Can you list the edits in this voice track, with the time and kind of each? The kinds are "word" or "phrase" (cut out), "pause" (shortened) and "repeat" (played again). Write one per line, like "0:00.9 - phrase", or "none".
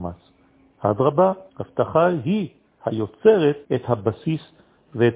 0:01.5 - pause
0:03.6 - pause